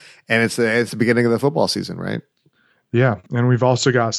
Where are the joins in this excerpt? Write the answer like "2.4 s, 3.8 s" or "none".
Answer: none